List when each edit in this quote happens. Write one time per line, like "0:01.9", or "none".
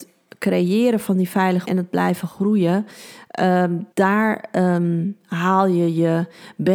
0:01.7
0:03.9